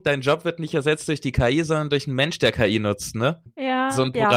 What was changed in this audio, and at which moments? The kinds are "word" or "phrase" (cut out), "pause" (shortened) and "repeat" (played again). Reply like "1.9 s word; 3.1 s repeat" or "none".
none